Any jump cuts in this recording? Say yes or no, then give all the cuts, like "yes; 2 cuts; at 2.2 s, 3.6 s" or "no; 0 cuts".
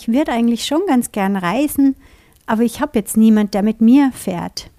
no; 0 cuts